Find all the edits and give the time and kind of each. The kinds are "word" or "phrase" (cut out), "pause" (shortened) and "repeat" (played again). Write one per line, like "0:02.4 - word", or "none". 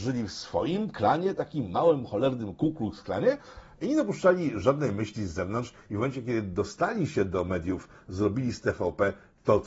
none